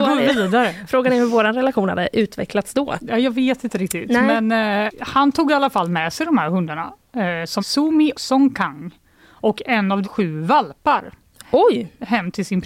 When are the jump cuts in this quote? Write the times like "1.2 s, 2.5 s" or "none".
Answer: 4.9 s, 7.6 s, 8.1 s, 10.0 s